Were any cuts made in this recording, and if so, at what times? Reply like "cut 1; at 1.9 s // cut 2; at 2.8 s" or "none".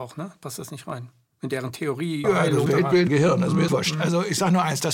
cut 1; at 2.2 s // cut 2; at 2.7 s // cut 3; at 3.1 s // cut 4; at 3.7 s